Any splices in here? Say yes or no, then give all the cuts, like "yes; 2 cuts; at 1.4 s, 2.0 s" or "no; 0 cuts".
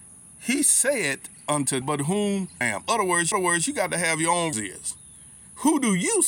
yes; 4 cuts; at 1.8 s, 2.6 s, 3.3 s, 4.5 s